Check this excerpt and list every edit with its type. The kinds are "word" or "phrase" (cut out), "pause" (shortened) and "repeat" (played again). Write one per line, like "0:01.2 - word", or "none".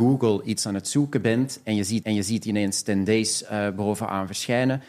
0:02.0 - repeat